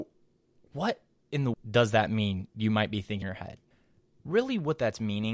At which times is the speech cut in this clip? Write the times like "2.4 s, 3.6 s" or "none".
1.5 s, 3.2 s